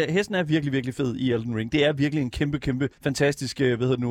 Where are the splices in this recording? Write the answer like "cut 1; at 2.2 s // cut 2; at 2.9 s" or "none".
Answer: cut 1; at 2.9 s